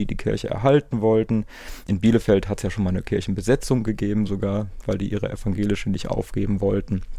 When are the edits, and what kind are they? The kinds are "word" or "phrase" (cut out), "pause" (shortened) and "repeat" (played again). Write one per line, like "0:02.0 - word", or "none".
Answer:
none